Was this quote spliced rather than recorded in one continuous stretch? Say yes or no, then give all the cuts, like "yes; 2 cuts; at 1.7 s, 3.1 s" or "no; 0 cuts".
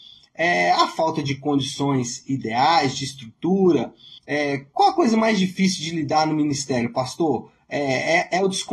yes; 1 cut; at 4.2 s